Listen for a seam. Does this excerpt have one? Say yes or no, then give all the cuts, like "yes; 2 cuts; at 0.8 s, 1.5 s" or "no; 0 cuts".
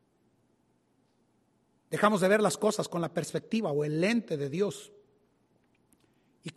no; 0 cuts